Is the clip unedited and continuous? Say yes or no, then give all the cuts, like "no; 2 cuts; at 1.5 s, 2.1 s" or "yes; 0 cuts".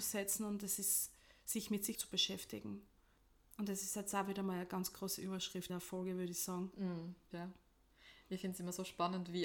no; 3 cuts; at 1.9 s, 5.7 s, 7.3 s